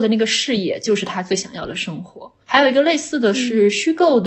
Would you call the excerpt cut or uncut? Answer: cut